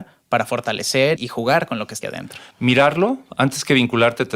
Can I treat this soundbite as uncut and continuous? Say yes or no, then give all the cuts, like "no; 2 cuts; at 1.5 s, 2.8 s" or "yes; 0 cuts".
no; 2 cuts; at 1.2 s, 2.0 s